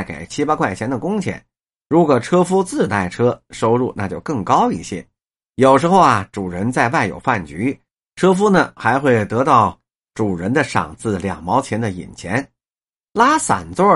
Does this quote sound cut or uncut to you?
cut